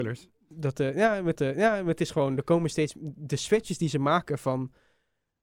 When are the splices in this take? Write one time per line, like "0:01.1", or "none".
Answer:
0:01.4